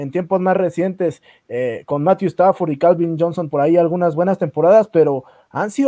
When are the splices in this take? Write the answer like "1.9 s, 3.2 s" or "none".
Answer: 3.5 s